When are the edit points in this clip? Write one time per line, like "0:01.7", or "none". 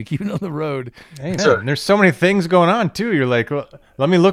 0:01.4

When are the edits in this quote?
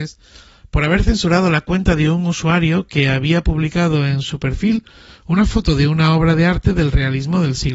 none

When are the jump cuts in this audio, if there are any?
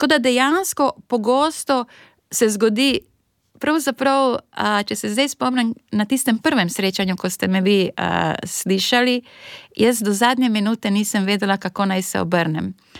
none

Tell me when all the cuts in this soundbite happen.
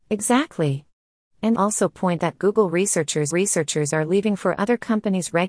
0:01.5
0:02.2
0:03.3

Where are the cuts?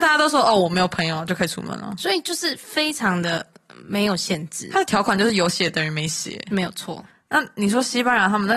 0:07.1

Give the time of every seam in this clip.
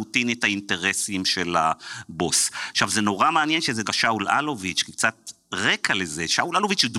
0:03.9

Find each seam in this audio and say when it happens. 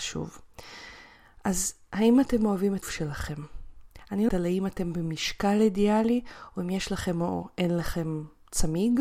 0:02.8
0:04.3

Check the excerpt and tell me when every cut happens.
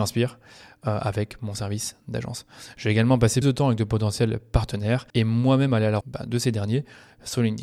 0:03.4
0:05.1
0:06.0

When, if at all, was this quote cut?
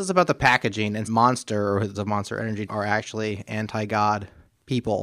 0:01.0
0:01.9
0:02.7

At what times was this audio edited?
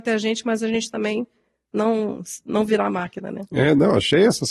none

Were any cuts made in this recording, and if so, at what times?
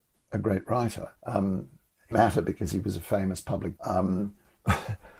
0:01.2
0:02.1
0:03.8

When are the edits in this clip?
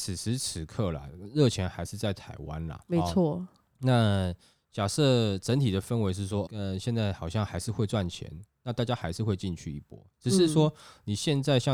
0:06.5

